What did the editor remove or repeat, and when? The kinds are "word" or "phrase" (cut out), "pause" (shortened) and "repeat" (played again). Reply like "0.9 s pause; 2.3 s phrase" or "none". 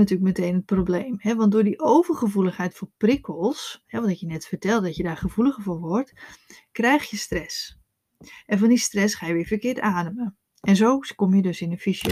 none